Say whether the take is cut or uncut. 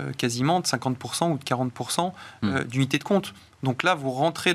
uncut